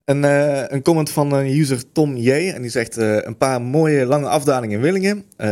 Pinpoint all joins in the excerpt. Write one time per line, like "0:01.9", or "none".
none